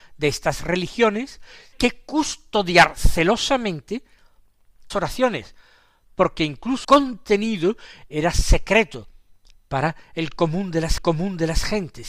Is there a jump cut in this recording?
yes; 4 cuts; at 1.7 s, 4.9 s, 6.8 s, 11.0 s

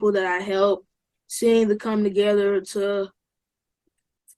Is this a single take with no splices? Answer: no; 1 cut; at 1.8 s

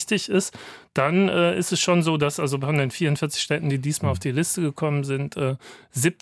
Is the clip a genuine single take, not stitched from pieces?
yes; 0 cuts

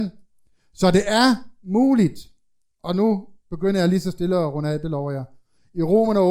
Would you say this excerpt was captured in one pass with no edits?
yes; 0 cuts

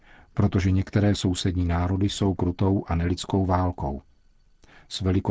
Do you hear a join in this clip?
yes; 1 cut; at 2.4 s

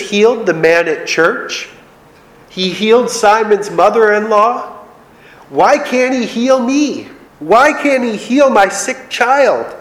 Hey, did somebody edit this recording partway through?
yes; 1 cut; at 7.3 s

